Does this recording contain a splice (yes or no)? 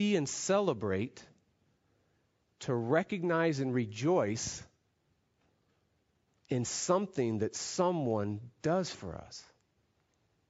no